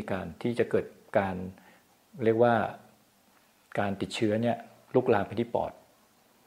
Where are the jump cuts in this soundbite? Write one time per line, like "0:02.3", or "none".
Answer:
none